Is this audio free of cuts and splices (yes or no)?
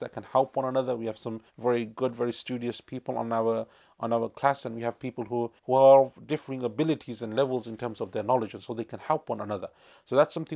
no